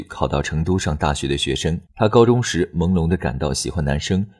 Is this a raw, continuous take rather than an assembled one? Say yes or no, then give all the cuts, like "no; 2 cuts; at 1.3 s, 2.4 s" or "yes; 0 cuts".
no; 1 cut; at 1.9 s